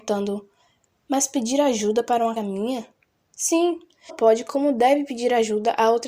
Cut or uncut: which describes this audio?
cut